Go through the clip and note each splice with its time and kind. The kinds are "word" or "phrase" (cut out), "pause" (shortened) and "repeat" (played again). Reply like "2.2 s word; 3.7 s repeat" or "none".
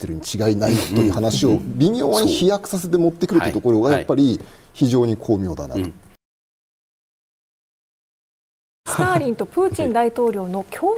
none